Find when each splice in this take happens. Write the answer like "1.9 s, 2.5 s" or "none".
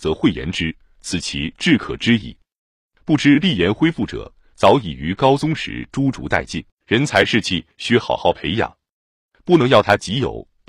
6.7 s